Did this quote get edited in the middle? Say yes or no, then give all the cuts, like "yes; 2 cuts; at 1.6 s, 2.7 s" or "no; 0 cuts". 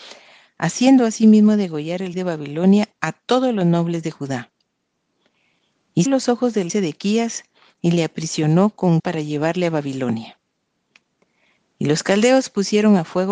yes; 4 cuts; at 2.1 s, 6.1 s, 6.7 s, 9.0 s